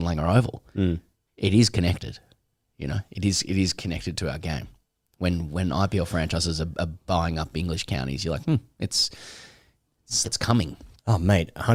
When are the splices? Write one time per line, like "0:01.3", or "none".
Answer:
0:10.2

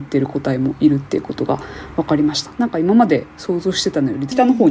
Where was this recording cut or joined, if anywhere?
none

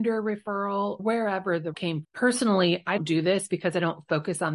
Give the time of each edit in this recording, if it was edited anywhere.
0:01.0
0:01.7
0:02.0
0:03.0

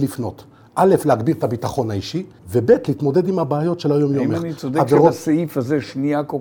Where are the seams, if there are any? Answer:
0:02.4

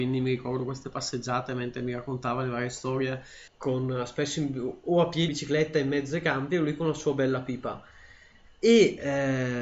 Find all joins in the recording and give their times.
0:03.5
0:05.3

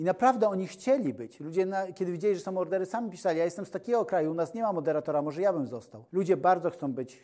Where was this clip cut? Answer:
0:06.1

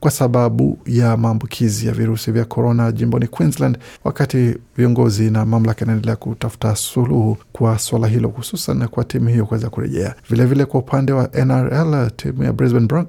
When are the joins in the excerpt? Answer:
0:04.0
0:07.4
0:10.2

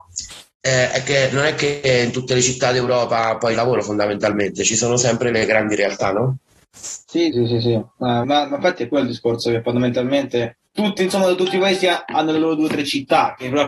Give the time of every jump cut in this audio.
0:03.5
0:07.3
0:08.2
0:10.7

